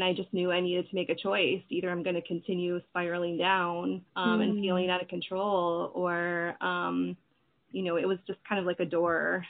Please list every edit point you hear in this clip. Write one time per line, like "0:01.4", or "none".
0:04.1

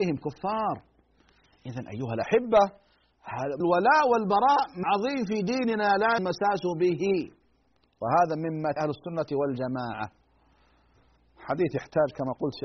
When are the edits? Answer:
0:03.6
0:04.8
0:06.2
0:07.5
0:08.8

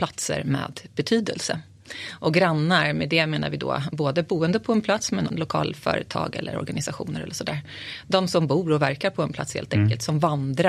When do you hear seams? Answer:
0:05.3

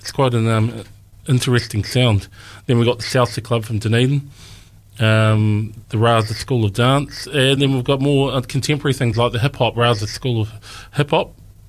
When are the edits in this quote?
none

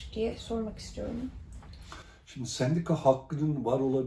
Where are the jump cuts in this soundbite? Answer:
none

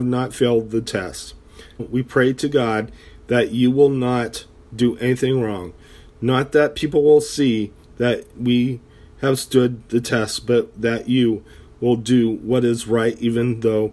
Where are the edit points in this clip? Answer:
0:01.8

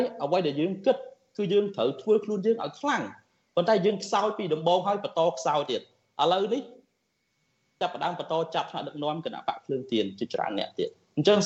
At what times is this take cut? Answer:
none

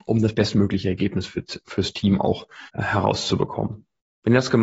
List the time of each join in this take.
0:02.7

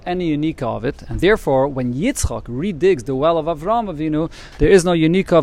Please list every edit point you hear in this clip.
none

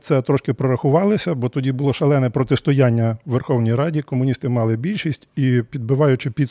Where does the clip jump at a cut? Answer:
none

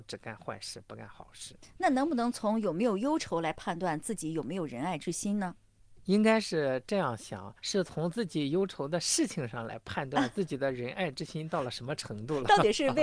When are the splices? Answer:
0:07.6

